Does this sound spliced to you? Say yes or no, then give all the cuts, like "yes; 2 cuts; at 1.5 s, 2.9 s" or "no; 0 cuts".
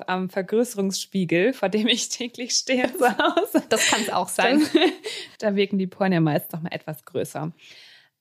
no; 0 cuts